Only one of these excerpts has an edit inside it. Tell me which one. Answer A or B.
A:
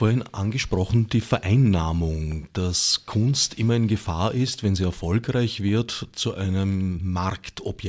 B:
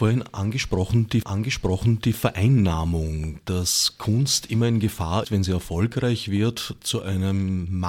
B